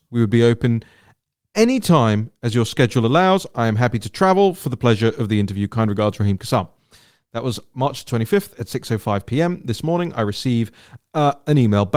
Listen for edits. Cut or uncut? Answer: uncut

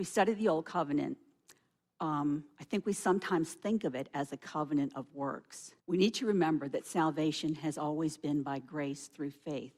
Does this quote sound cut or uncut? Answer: cut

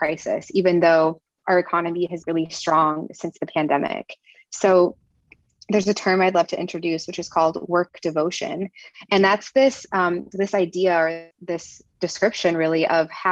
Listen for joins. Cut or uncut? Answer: cut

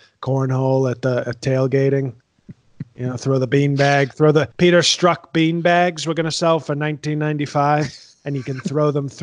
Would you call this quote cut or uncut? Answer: cut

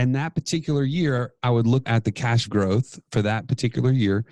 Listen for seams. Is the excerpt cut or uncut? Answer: cut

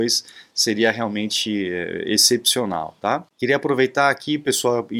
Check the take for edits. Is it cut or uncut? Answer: cut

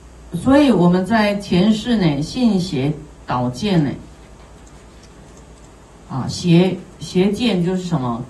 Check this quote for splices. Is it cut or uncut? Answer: uncut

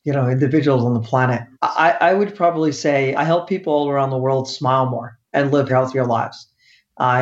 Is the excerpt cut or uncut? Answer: cut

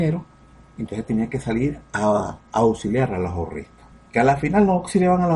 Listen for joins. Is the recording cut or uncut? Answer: uncut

